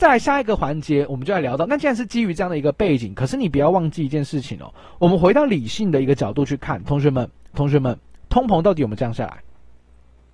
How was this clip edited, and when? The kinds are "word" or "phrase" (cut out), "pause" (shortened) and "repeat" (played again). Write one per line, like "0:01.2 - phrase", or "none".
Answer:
0:07.5 - repeat